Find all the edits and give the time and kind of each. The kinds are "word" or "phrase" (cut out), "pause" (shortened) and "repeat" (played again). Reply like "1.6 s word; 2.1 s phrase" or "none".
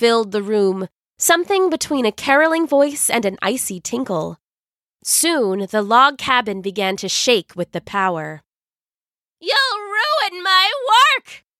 none